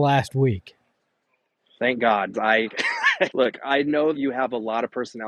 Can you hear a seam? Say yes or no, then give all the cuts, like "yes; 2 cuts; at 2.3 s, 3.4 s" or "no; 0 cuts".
yes; 3 cuts; at 2.3 s, 3.3 s, 4.1 s